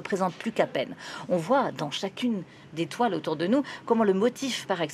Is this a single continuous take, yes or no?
yes